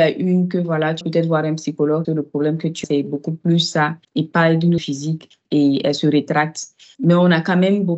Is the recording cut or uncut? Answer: cut